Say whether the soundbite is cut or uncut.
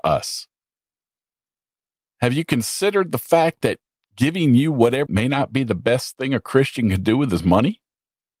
cut